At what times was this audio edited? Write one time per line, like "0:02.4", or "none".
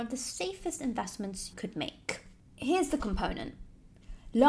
0:01.5
0:03.0